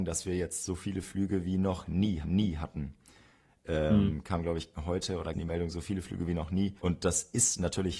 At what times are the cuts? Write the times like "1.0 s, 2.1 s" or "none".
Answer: 2.2 s, 4.7 s, 5.3 s, 6.8 s